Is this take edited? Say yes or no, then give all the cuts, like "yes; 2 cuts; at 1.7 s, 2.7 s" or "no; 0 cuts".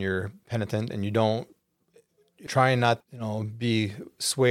yes; 2 cuts; at 2.5 s, 3.0 s